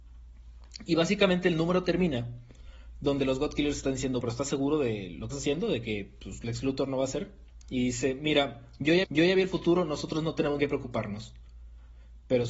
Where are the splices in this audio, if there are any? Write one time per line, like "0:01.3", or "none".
0:04.2
0:05.3
0:09.0
0:10.6